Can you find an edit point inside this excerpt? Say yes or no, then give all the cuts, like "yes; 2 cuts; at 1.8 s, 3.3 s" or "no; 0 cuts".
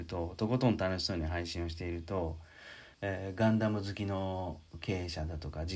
yes; 1 cut; at 2.9 s